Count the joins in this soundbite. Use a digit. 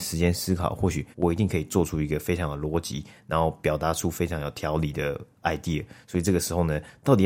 1